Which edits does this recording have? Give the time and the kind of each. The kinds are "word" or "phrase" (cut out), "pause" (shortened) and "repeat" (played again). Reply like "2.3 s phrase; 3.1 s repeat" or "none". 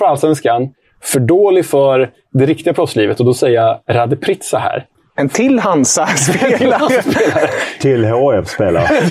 4.9 s pause